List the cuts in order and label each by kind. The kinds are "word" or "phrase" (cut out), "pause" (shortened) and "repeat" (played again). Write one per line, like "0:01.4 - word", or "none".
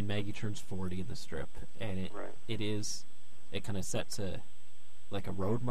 none

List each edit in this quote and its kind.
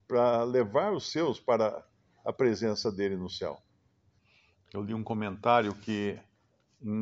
none

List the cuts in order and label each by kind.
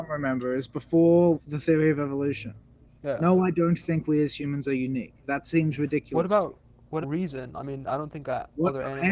0:07.0 - phrase

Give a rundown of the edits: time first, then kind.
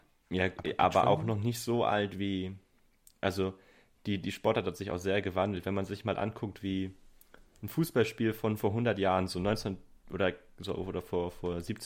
none

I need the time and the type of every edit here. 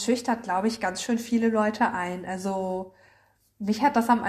none

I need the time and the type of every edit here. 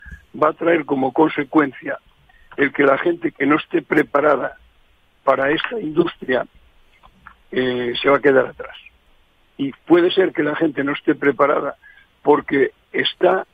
none

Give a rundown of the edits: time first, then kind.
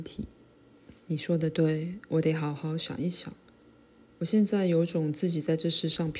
0:01.0 - pause

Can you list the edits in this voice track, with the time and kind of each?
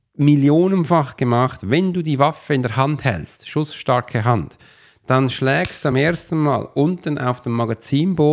none

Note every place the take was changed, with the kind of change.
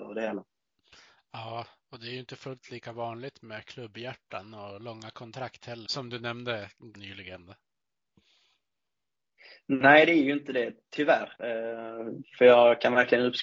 0:05.9 - word
0:06.9 - word

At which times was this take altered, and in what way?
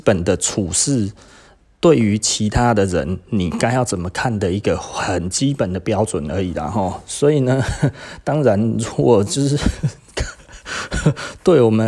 none

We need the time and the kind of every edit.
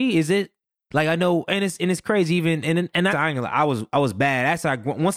0:03.1 - phrase

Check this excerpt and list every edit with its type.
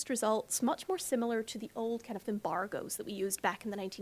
0:02.2 - word

